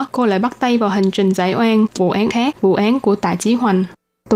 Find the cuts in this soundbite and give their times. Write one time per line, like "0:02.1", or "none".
0:02.0
0:02.3